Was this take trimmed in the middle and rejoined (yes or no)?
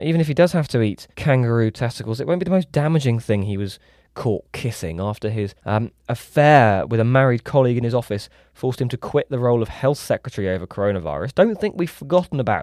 yes